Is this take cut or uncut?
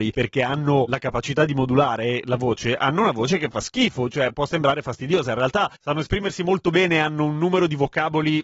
cut